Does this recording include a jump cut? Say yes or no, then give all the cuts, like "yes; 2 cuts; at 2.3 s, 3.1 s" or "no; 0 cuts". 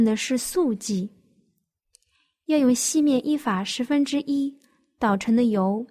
no; 0 cuts